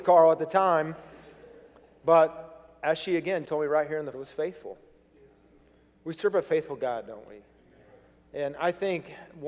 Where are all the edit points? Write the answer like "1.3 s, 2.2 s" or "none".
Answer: 3.5 s, 4.1 s

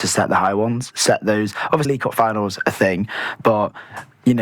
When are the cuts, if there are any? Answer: 1.8 s

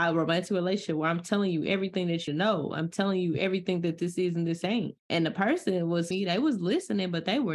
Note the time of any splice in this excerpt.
2.3 s, 5.0 s, 6.1 s

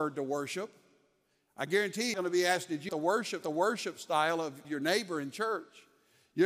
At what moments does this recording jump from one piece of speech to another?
2.1 s, 2.9 s, 3.4 s, 4.6 s

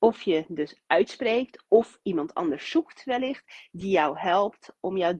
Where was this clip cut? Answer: none

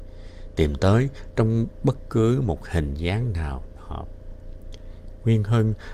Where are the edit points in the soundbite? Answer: 3.8 s

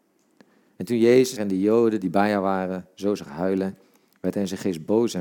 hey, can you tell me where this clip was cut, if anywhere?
1.4 s

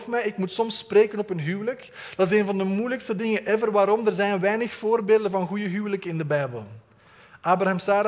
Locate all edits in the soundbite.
none

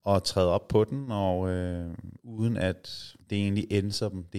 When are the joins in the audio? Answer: 2.2 s, 3.2 s

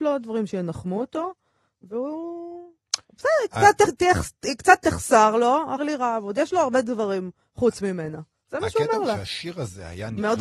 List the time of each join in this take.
5.8 s

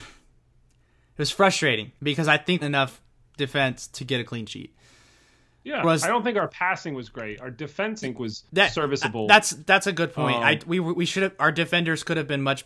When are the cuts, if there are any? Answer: 2.0 s, 2.6 s, 5.8 s, 8.0 s, 8.5 s

